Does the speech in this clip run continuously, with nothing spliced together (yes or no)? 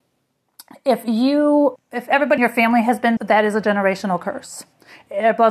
no